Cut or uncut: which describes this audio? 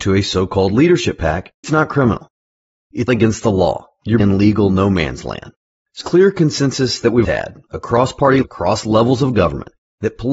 cut